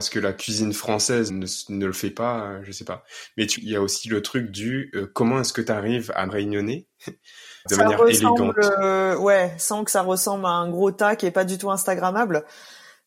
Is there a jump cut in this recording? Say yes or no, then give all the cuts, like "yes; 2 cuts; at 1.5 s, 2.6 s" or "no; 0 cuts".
yes; 4 cuts; at 1.3 s, 3.6 s, 6.3 s, 7.7 s